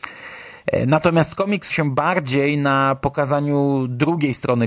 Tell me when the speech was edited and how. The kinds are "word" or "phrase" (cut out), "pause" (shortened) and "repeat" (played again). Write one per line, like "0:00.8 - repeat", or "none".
0:01.7 - word